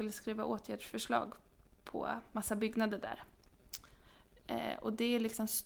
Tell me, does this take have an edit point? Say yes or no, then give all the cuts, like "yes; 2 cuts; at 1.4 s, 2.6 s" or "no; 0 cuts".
no; 0 cuts